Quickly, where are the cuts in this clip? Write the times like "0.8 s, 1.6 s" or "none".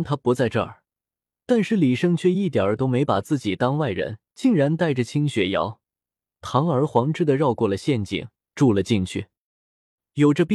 4.3 s, 8.4 s